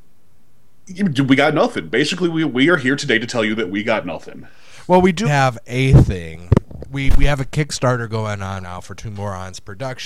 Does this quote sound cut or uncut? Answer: cut